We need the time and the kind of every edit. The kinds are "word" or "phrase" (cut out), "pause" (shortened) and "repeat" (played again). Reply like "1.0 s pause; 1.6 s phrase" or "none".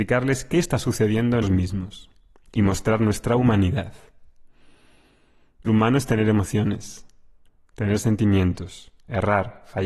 1.4 s word; 5.7 s word